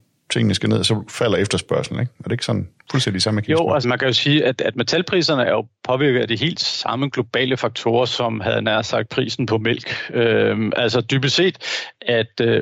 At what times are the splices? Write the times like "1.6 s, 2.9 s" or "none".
3.8 s